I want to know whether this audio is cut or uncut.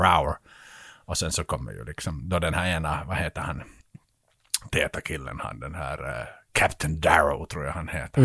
uncut